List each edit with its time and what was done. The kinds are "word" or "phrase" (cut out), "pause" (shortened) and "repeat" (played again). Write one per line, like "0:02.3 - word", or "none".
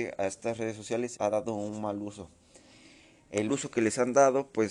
0:01.2 - word
0:03.5 - word